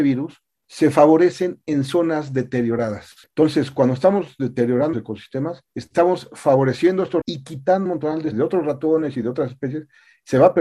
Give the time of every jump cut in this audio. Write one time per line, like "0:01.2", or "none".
0:04.9
0:07.2
0:07.9
0:08.3